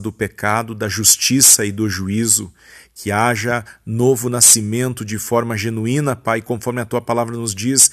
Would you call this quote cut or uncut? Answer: uncut